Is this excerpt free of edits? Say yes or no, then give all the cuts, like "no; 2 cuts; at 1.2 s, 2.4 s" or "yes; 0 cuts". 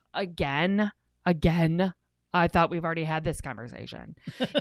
yes; 0 cuts